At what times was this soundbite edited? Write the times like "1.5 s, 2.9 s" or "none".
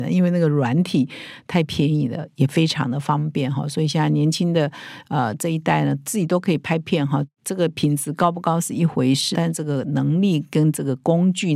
9.3 s